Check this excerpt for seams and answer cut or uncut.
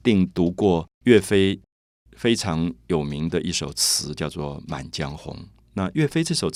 cut